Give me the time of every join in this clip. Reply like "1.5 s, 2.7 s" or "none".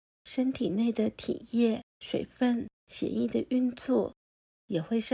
1.9 s, 2.7 s